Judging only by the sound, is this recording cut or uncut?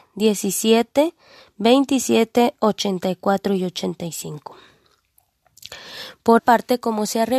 cut